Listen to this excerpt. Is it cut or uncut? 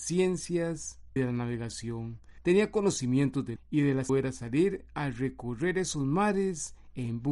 cut